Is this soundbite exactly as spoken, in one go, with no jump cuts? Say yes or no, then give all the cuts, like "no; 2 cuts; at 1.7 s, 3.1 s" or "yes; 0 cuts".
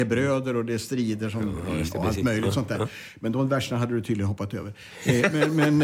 yes; 0 cuts